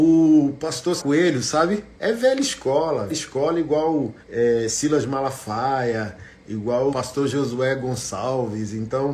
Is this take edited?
yes; 5 cuts; at 1.0 s, 1.9 s, 3.1 s, 4.2 s, 6.9 s

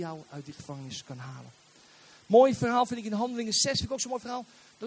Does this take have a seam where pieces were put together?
no; 0 cuts

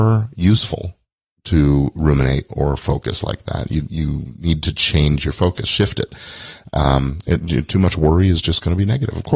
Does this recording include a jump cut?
no; 0 cuts

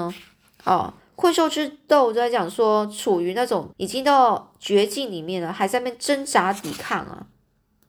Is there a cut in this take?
yes; 2 cuts; at 1.0 s, 3.7 s

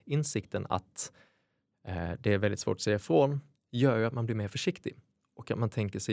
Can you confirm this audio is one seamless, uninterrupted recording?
yes; 0 cuts

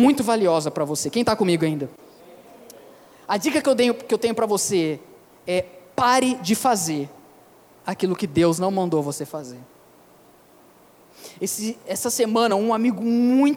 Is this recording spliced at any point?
no; 0 cuts

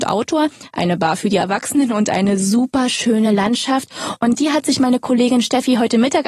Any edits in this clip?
no; 0 cuts

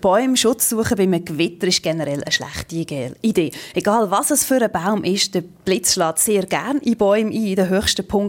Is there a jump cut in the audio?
no; 0 cuts

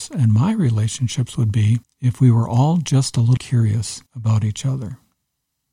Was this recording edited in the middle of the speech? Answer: yes; 3 cuts; at 1.8 s, 3.4 s, 4.1 s

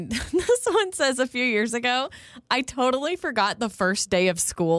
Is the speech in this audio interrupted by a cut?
no; 0 cuts

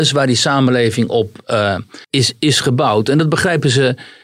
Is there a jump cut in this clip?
yes; 1 cut; at 2.0 s

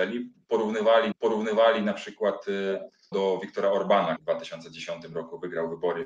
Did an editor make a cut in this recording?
yes; 3 cuts; at 1.1 s, 3.1 s, 4.2 s

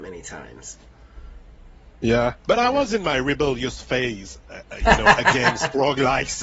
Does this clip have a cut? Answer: no; 0 cuts

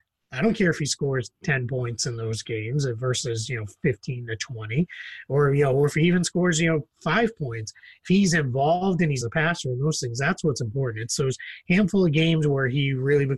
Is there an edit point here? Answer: yes; 1 cut; at 9.2 s

